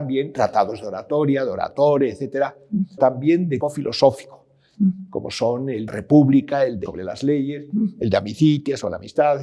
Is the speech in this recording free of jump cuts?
no; 4 cuts; at 3.0 s, 3.6 s, 5.9 s, 6.9 s

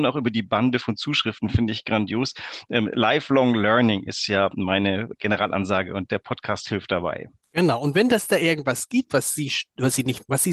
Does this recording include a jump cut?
yes; 1 cut; at 5.1 s

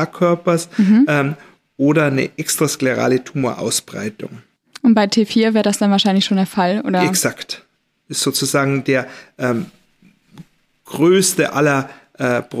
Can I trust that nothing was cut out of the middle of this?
yes; 0 cuts

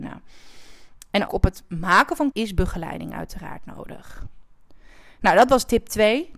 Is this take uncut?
no; 2 cuts; at 1.3 s, 2.3 s

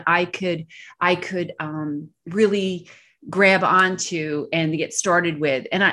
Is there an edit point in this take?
no; 0 cuts

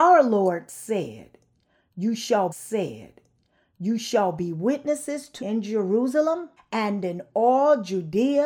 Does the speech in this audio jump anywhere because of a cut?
yes; 3 cuts; at 2.5 s, 5.4 s, 6.6 s

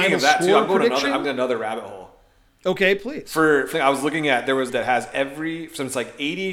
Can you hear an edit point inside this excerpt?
yes; 4 cuts; at 1.2 s, 2.5 s, 3.7 s, 4.7 s

